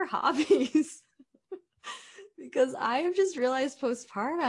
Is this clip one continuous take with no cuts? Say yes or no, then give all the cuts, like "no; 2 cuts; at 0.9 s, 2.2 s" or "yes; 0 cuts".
yes; 0 cuts